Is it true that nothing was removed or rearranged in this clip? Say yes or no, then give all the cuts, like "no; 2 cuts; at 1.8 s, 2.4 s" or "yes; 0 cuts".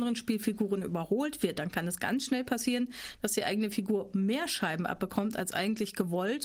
yes; 0 cuts